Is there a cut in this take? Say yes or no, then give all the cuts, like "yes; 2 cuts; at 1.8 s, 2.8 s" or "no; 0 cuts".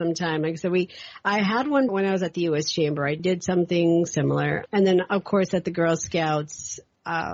yes; 3 cuts; at 1.9 s, 3.2 s, 4.7 s